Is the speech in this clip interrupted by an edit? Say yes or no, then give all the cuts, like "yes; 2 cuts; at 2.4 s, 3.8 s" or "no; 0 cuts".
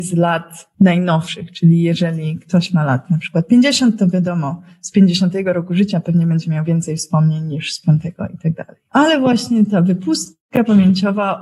no; 0 cuts